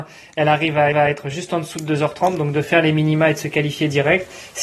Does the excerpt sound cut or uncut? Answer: cut